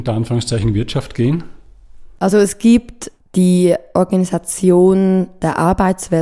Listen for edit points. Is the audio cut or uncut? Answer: uncut